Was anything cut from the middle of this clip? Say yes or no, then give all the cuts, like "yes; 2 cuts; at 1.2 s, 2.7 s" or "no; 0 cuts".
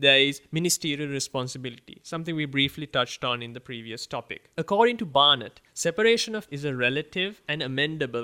yes; 3 cuts; at 4.5 s, 5.7 s, 6.5 s